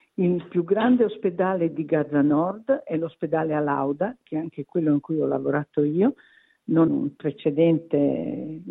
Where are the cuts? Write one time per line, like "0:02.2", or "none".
0:06.9

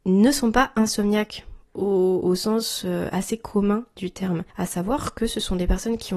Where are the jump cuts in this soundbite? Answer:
0:04.5

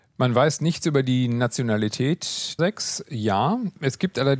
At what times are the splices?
0:02.6

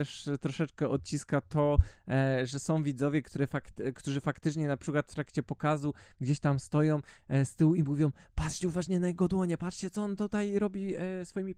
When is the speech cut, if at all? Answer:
none

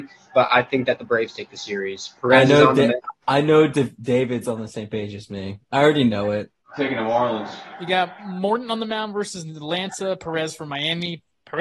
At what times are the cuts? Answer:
0:06.6

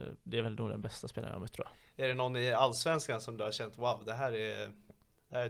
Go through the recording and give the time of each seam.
none

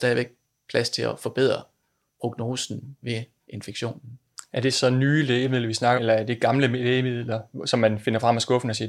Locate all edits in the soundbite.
0:03.0
0:06.0

